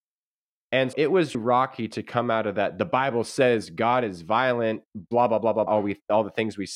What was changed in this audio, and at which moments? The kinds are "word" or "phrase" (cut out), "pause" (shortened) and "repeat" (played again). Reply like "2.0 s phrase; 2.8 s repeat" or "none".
0.9 s word; 1.3 s word; 4.9 s pause; 5.7 s word